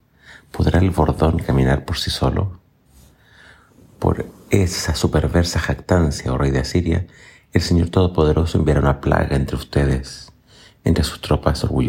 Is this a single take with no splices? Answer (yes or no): yes